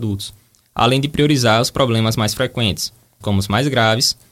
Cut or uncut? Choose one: cut